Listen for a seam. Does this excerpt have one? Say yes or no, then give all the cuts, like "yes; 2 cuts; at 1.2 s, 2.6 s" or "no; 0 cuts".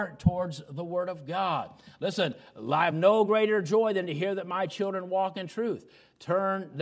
no; 0 cuts